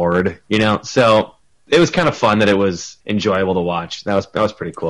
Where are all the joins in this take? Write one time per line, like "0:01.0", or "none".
0:03.0